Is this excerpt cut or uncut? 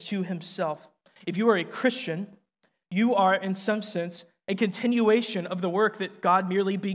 uncut